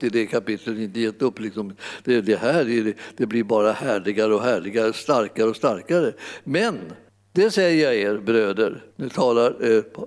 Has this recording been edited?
yes; 2 cuts; at 7.1 s, 8.9 s

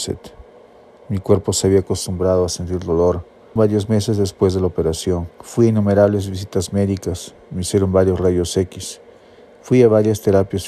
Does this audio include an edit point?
yes; 2 cuts; at 3.6 s, 5.3 s

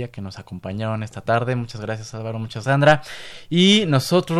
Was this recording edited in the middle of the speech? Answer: yes; 1 cut; at 2.6 s

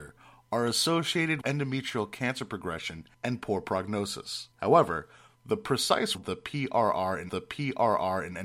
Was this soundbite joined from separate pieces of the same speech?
yes; 5 cuts; at 1.4 s, 3.1 s, 4.5 s, 6.1 s, 7.3 s

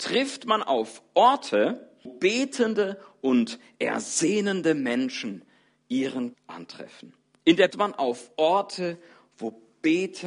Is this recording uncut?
no; 3 cuts; at 2.1 s, 6.3 s, 7.7 s

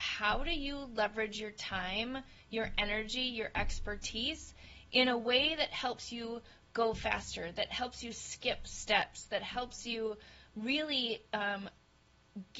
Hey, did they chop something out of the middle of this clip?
no; 0 cuts

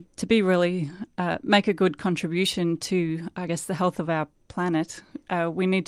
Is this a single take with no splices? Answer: yes; 0 cuts

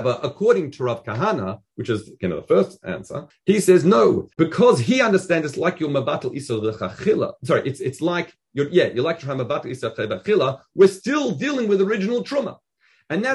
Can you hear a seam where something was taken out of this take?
yes; 2 cuts; at 3.3 s, 4.3 s

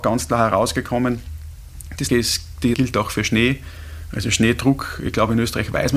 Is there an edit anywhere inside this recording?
yes; 2 cuts; at 2.1 s, 2.7 s

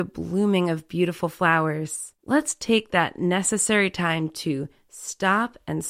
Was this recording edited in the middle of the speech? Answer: yes; 1 cut; at 2.2 s

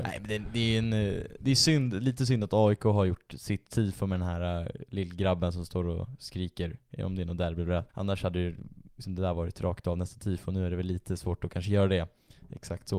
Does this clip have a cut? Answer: yes; 1 cut; at 7.9 s

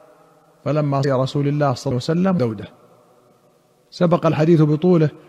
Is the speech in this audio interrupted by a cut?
yes; 3 cuts; at 1.0 s, 1.9 s, 2.4 s

